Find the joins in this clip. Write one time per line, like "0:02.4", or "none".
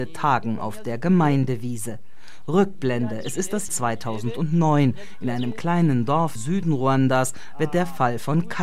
0:03.7
0:06.4